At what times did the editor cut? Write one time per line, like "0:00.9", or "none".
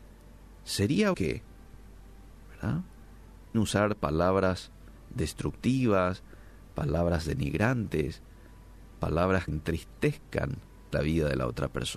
0:01.1
0:03.5
0:09.5
0:10.9